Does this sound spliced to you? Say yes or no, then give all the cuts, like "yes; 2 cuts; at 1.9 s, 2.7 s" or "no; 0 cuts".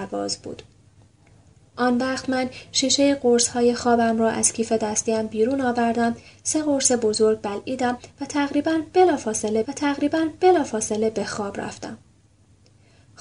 yes; 1 cut; at 9.6 s